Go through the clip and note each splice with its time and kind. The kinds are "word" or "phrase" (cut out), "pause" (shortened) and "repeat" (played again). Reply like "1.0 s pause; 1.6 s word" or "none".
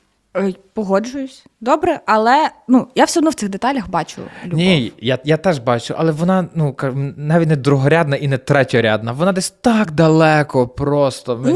none